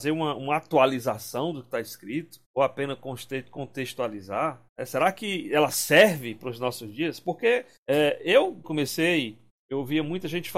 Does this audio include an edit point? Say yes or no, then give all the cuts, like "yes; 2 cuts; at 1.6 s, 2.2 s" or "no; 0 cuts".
yes; 5 cuts; at 2.4 s, 4.7 s, 7.8 s, 8.6 s, 9.5 s